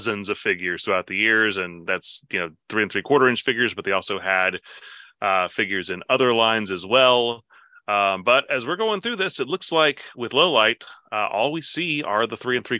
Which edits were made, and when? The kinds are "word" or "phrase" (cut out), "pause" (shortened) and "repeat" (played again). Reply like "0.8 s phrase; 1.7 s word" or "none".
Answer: none